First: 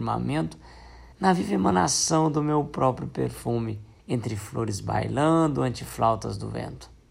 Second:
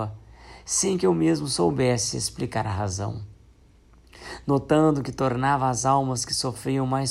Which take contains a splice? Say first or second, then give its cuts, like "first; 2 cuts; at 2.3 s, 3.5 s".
first; 2 cuts; at 1.1 s, 4.0 s